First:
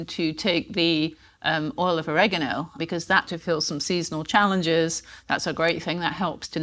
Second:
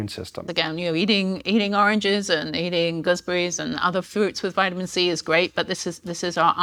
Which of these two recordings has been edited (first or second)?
first